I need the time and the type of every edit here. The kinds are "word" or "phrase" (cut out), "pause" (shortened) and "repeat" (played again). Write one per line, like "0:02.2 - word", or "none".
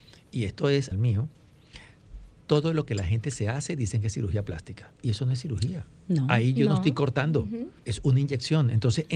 0:00.9 - phrase
0:07.8 - pause